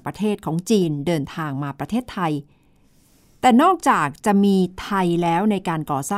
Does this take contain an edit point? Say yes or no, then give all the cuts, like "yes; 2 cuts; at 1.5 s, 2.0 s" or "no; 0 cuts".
no; 0 cuts